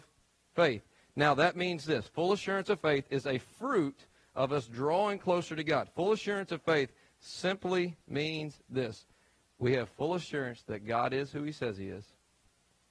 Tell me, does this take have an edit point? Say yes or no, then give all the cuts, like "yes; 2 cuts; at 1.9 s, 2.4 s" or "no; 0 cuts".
no; 0 cuts